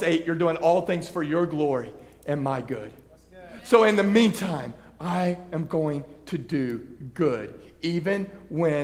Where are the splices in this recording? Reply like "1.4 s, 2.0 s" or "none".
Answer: none